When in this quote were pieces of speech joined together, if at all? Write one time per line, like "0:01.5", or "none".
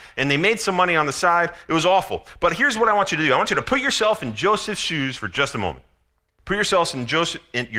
none